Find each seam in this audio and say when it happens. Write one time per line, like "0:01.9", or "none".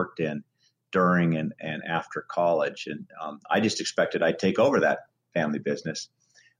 none